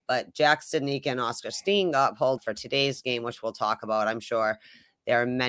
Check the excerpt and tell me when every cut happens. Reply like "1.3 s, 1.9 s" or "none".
2.4 s